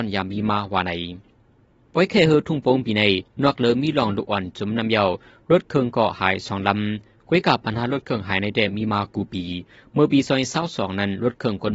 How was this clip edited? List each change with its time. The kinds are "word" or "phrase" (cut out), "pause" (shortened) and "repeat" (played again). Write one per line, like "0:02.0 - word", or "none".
none